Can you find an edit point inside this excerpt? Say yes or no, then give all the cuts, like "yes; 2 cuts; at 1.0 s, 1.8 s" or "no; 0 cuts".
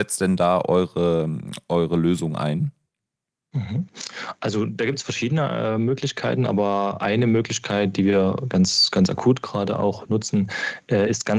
no; 0 cuts